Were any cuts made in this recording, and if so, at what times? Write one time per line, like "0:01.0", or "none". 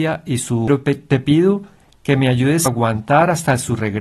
0:02.7